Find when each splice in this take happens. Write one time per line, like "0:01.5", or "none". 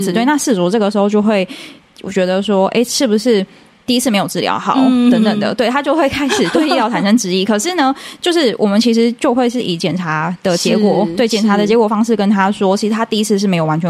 none